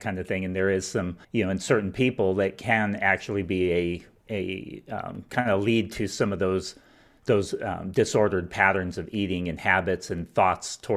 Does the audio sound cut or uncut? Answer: cut